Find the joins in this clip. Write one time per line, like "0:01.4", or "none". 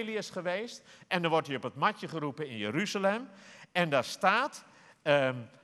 none